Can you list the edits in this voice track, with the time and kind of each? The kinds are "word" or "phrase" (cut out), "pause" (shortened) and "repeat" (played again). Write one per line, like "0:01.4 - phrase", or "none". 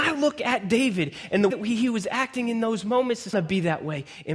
0:01.5 - word
0:03.3 - phrase